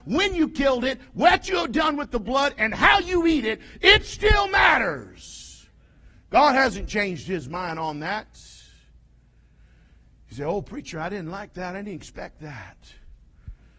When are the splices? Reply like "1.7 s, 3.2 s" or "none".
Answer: none

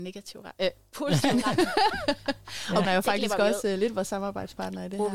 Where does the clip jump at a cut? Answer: 2.8 s

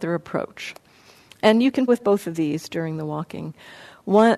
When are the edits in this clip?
1.9 s

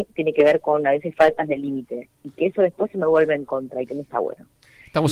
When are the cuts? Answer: none

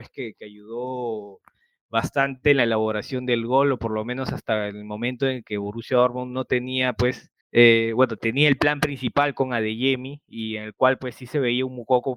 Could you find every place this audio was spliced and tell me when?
7.4 s

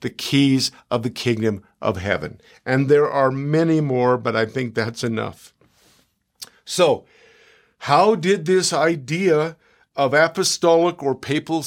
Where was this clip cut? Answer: none

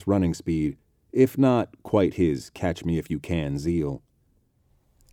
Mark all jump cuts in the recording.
none

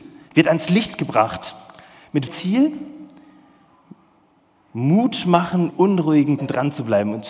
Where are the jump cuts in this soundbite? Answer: 2.3 s, 5.7 s, 6.4 s

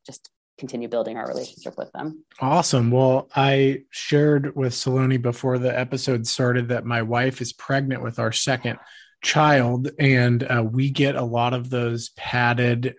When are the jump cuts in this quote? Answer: 2.3 s

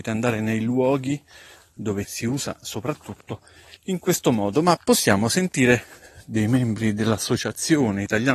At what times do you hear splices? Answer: 2.0 s, 3.8 s

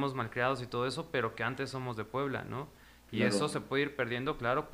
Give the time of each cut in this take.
none

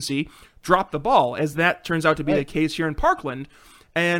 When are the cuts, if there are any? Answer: none

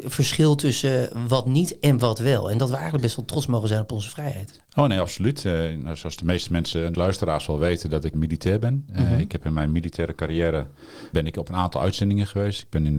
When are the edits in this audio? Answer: 6.9 s, 8.1 s, 11.1 s

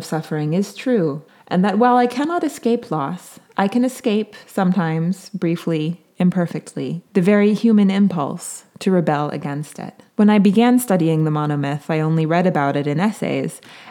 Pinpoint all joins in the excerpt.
1.3 s, 4.4 s, 7.1 s, 10.1 s

